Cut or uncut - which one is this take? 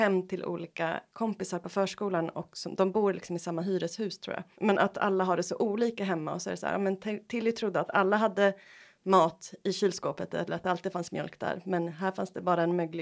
cut